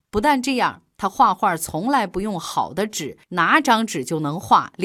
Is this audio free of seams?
no; 1 cut; at 3.2 s

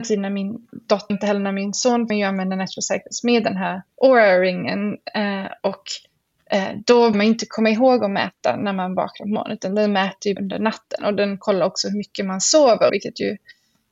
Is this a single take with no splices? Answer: no; 6 cuts; at 1.1 s, 2.1 s, 3.9 s, 7.1 s, 10.4 s, 12.9 s

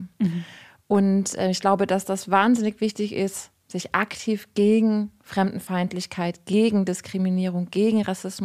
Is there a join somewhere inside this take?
no; 0 cuts

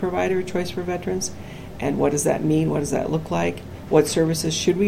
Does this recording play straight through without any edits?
yes; 0 cuts

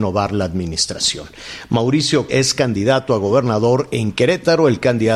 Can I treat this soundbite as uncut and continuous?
no; 1 cut; at 2.3 s

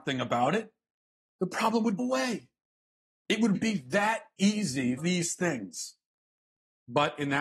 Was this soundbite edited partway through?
yes; 3 cuts; at 2.0 s, 3.5 s, 5.0 s

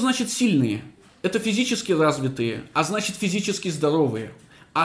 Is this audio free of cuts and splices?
yes; 0 cuts

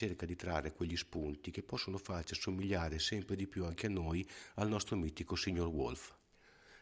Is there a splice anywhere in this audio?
no; 0 cuts

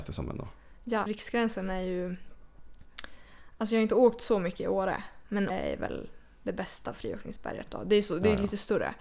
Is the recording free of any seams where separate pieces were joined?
no; 2 cuts; at 1.1 s, 5.5 s

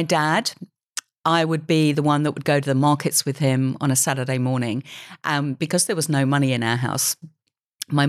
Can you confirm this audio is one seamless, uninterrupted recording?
yes; 0 cuts

